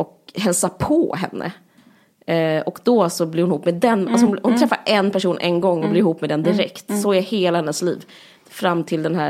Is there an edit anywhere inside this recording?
no; 0 cuts

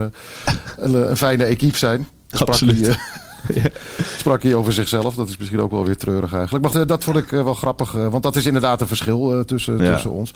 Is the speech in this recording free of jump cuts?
no; 1 cut; at 6.7 s

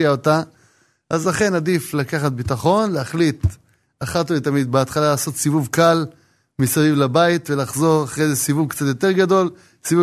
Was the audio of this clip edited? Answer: no; 0 cuts

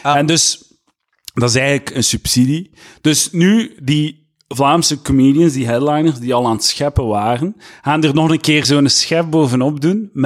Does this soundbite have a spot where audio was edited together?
no; 0 cuts

